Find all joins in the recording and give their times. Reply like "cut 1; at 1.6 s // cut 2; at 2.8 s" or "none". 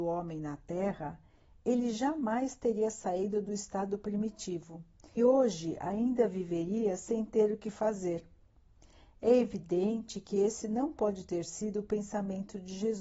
cut 1; at 5.2 s

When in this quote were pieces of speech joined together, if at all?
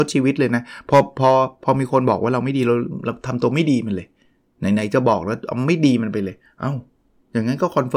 none

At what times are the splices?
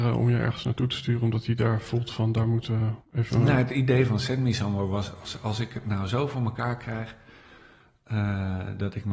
cut 1; at 3.0 s

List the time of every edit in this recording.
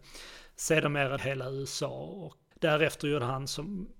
cut 1; at 1.2 s // cut 2; at 2.5 s

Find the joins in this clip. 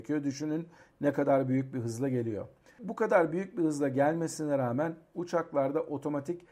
none

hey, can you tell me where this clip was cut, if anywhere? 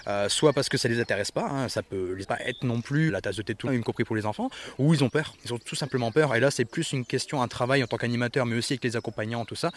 cut 1; at 2.2 s // cut 2; at 3.1 s // cut 3; at 3.7 s // cut 4; at 5.4 s

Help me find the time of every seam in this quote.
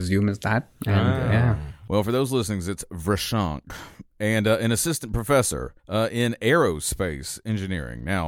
cut 1; at 5.8 s

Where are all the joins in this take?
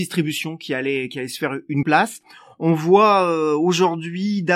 cut 1; at 1.8 s

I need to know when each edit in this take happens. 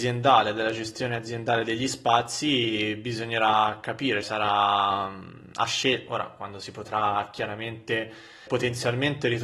cut 1; at 4.2 s // cut 2; at 8.5 s

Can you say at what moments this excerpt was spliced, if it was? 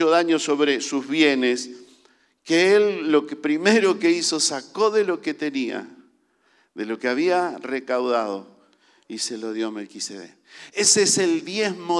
none

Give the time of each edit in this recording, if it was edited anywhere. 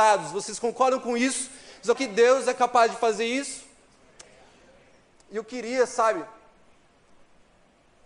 cut 1; at 2.0 s

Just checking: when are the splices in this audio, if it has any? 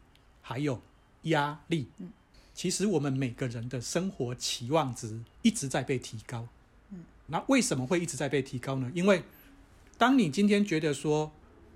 cut 1; at 1.9 s // cut 2; at 5.3 s // cut 3; at 7.3 s

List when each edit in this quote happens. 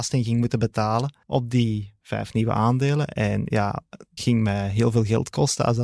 cut 1; at 1.2 s // cut 2; at 4.2 s

